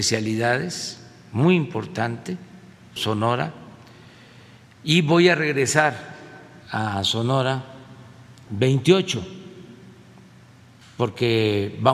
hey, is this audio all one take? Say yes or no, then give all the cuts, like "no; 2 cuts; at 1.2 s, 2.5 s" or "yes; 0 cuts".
no; 3 cuts; at 3.0 s, 6.6 s, 8.5 s